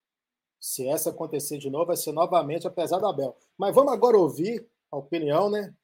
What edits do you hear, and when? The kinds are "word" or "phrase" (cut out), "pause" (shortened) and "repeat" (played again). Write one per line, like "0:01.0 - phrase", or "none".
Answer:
none